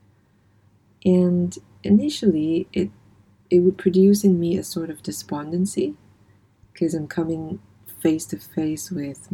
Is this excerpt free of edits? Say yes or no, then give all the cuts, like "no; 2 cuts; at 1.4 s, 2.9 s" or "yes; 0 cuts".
yes; 0 cuts